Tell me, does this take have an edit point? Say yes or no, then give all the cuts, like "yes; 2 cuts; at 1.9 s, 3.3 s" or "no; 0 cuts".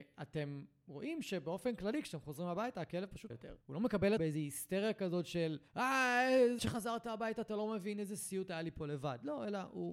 yes; 5 cuts; at 3.3 s, 3.6 s, 4.2 s, 5.7 s, 6.6 s